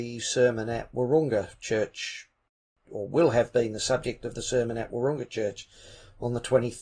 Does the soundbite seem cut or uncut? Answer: uncut